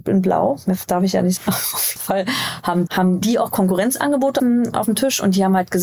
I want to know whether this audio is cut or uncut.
cut